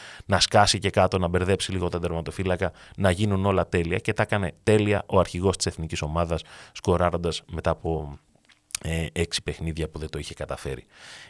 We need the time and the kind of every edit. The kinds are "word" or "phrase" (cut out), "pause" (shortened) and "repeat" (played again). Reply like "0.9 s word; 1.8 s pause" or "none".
none